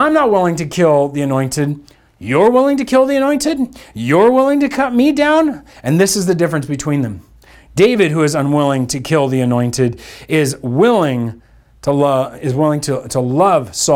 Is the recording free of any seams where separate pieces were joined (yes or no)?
yes